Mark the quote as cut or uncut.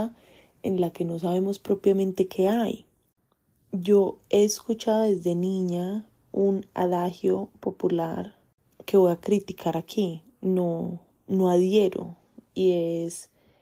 uncut